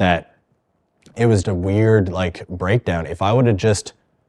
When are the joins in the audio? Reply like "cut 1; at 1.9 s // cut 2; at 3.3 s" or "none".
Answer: cut 1; at 1.4 s